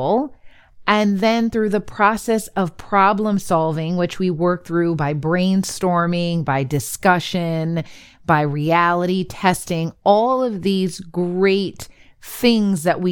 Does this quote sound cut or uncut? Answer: uncut